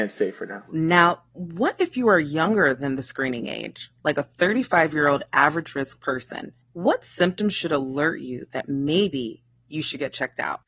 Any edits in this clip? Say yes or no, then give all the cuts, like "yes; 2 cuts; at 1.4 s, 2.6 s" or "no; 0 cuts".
yes; 1 cut; at 6.6 s